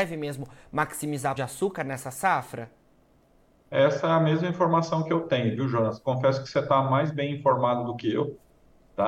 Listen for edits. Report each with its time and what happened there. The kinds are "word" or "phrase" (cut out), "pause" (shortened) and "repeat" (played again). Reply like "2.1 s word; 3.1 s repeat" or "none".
1.4 s word